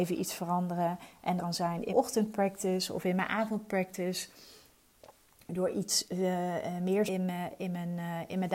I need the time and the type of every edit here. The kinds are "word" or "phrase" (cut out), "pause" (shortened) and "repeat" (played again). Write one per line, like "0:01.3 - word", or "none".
0:01.4 - word
0:01.9 - word
0:07.1 - word